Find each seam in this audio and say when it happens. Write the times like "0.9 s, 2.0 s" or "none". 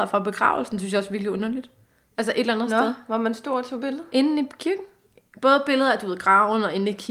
none